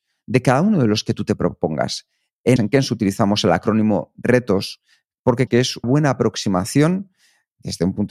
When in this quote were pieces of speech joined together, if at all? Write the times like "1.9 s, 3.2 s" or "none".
2.6 s, 5.5 s, 5.8 s